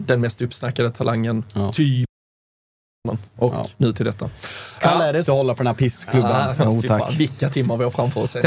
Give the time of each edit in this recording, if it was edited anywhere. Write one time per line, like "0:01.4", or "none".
0:03.3
0:03.7
0:05.2
0:06.6